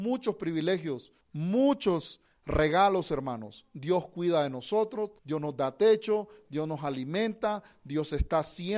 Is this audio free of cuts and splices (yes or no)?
no